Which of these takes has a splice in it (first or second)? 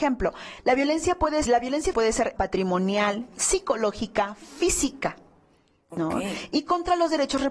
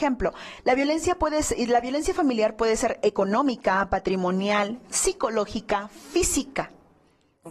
first